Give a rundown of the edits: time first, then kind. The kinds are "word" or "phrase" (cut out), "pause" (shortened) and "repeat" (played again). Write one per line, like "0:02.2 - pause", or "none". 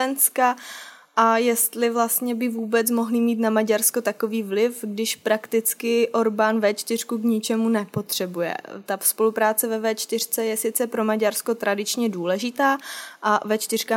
none